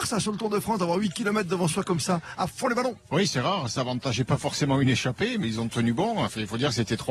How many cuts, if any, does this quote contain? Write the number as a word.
one